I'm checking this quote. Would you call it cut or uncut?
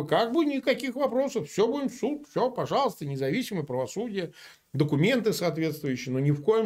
uncut